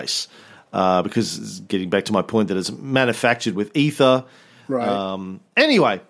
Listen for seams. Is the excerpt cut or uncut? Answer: uncut